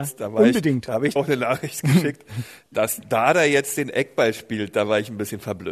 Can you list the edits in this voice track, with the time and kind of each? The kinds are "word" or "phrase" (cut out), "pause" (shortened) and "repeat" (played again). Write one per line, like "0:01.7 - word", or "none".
0:01.2 - word